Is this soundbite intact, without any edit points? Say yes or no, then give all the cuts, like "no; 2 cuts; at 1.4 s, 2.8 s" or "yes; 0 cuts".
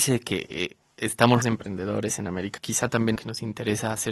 no; 3 cuts; at 1.4 s, 2.6 s, 3.2 s